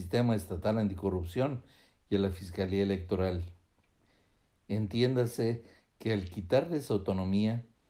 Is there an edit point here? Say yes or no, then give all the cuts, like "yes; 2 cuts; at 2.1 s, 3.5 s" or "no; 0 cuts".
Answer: no; 0 cuts